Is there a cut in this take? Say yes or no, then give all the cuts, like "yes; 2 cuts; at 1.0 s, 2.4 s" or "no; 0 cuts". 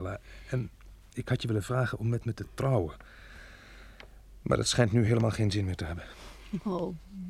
no; 0 cuts